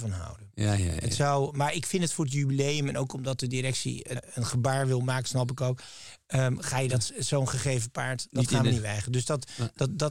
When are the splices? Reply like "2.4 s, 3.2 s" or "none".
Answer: 4.2 s